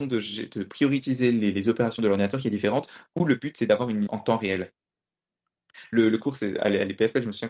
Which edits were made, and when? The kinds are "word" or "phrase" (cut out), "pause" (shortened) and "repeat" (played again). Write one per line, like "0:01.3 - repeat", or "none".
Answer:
0:04.1 - word